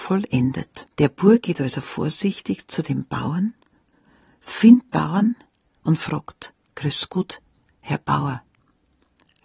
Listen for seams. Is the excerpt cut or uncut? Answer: cut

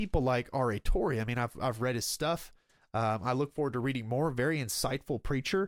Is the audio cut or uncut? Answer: uncut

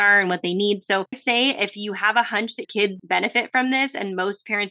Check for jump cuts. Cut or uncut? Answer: cut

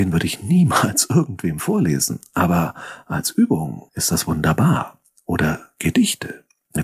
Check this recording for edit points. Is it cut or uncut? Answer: cut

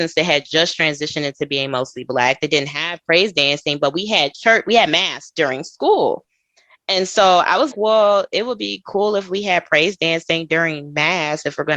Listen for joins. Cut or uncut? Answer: cut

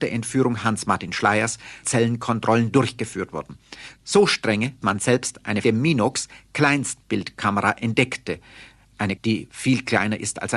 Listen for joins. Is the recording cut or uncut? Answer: cut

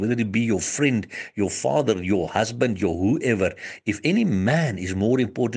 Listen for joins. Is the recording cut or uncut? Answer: uncut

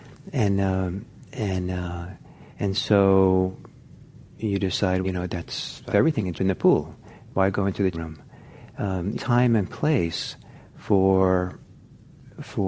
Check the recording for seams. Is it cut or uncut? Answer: cut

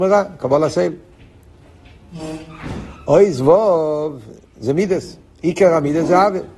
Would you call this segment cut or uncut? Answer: cut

